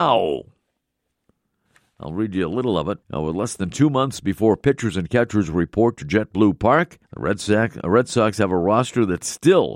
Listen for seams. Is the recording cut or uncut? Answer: cut